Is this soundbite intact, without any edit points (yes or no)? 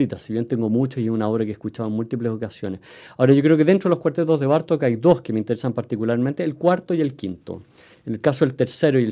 yes